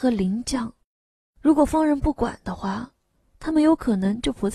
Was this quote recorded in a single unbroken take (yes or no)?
yes